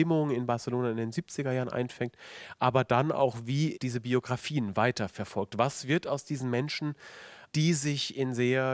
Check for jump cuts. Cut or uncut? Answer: cut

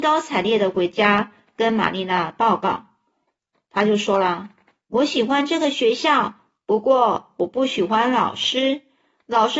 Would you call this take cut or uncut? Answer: uncut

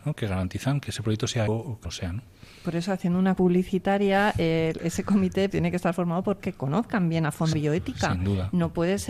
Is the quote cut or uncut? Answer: cut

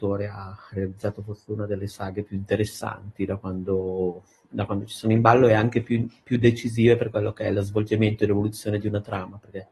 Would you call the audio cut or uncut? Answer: uncut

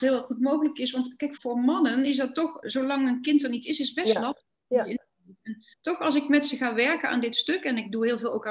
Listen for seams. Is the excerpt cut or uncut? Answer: cut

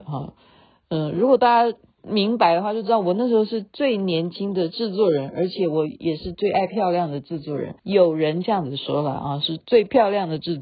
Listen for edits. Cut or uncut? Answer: cut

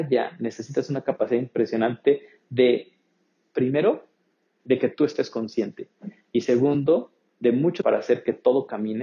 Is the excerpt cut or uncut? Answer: cut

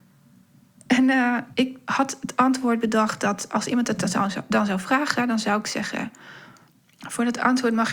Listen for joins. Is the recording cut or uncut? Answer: uncut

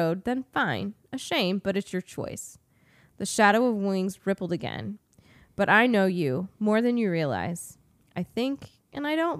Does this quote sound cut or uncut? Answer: uncut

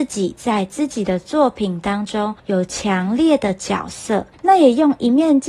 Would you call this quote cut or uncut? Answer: cut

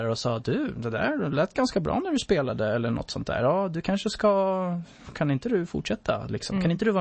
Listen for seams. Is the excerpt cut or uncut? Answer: uncut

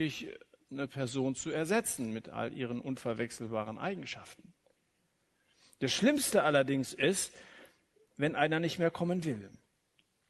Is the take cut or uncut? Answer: uncut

